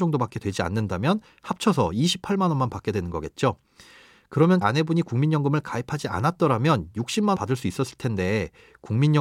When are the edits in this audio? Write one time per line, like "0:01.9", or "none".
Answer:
0:04.6
0:07.3

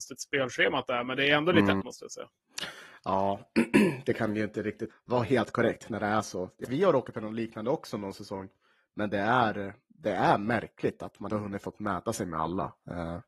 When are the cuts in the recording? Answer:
0:01.8
0:04.9
0:06.6
0:07.1
0:11.3

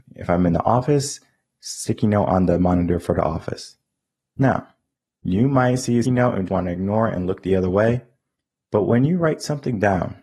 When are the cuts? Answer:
0:06.0
0:06.5

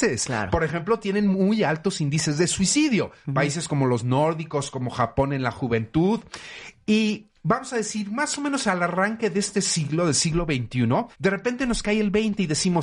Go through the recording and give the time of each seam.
0:11.1

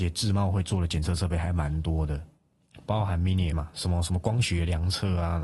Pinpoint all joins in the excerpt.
0:03.5

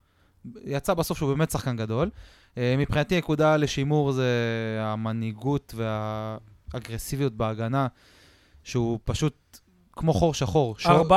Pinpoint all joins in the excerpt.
none

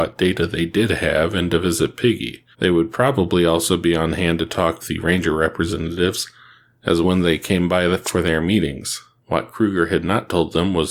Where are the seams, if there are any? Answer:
0:02.5
0:04.8
0:07.0
0:09.2

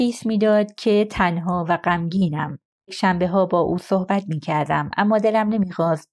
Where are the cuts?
0:02.9

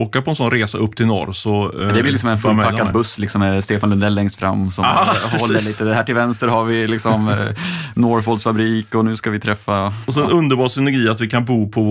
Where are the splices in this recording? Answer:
none

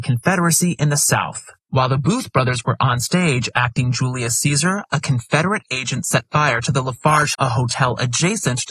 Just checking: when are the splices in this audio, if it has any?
0:01.6
0:07.3

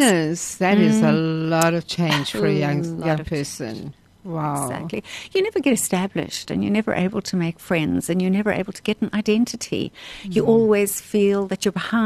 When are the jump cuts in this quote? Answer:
none

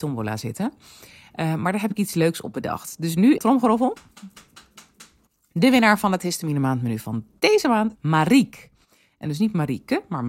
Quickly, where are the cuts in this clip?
0:03.4
0:08.0

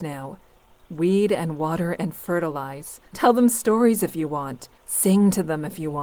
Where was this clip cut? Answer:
0:03.1
0:04.8

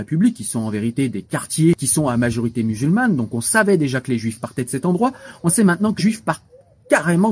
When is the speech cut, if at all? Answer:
0:06.0

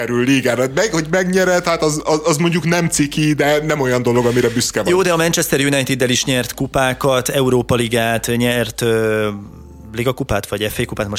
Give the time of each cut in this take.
none

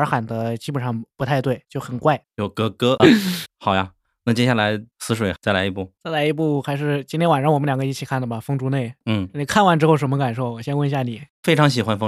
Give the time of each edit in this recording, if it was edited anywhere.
0:03.0

